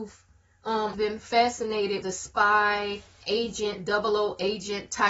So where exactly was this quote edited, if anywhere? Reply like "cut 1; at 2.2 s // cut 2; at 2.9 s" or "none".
cut 1; at 0.9 s // cut 2; at 2.0 s // cut 3; at 3.2 s